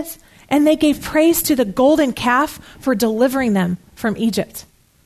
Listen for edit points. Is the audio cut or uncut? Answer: uncut